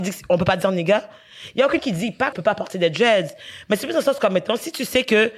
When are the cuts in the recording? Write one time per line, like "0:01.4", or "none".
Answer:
0:01.8
0:02.3